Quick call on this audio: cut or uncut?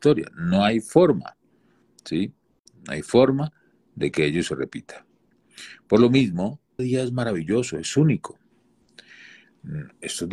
cut